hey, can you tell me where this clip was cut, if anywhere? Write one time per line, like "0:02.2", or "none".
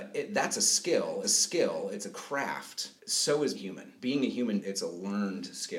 0:01.2
0:03.0
0:03.5
0:04.0
0:04.6